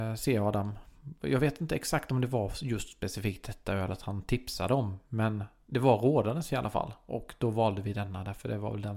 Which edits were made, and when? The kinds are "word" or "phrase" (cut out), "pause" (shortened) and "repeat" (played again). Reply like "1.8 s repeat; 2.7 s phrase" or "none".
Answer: none